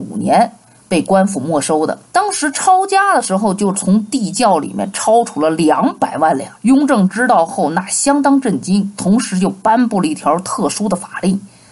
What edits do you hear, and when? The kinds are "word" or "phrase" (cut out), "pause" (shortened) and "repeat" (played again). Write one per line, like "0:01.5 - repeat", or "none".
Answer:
0:02.1 - pause
0:06.6 - pause